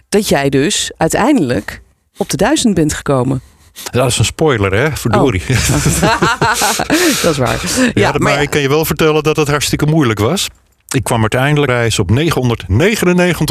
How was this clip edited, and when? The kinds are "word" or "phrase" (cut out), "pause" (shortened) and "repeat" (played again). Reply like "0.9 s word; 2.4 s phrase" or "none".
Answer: 1.9 s pause; 11.0 s word; 11.7 s phrase